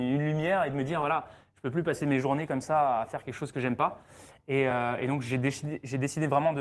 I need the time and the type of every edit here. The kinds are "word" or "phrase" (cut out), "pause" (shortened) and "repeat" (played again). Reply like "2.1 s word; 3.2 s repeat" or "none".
none